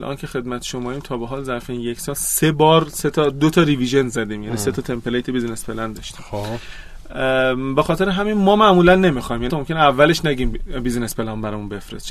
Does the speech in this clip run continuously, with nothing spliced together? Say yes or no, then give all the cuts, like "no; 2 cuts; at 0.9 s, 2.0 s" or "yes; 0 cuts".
no; 1 cut; at 9.5 s